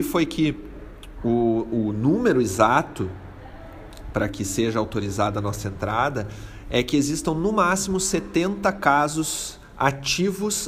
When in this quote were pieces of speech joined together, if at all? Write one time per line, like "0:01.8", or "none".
none